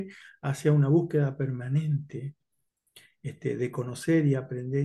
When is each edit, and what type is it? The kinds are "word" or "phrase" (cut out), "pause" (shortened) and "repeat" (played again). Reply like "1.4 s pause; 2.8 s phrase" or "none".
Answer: none